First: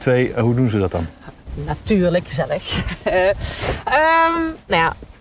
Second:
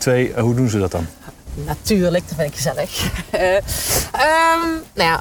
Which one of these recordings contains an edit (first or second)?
first